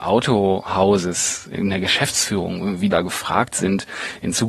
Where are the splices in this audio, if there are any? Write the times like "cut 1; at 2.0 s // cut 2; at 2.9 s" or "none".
cut 1; at 1.6 s // cut 2; at 2.9 s